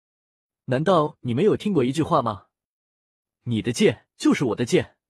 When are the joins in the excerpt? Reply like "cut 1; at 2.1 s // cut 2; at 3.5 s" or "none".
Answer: cut 1; at 4.1 s